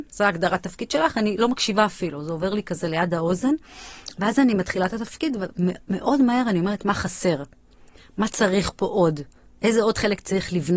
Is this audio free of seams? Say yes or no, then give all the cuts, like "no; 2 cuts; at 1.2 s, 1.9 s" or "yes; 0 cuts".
yes; 0 cuts